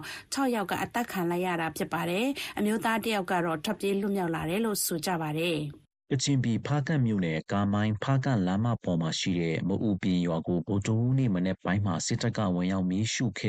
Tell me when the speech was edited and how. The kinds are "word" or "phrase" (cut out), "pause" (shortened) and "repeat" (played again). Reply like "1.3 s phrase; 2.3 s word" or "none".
none